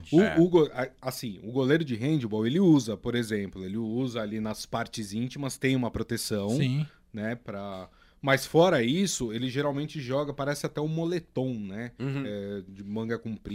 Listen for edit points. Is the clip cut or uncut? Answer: uncut